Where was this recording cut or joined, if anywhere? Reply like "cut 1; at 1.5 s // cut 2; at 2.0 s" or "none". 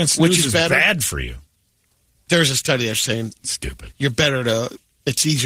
none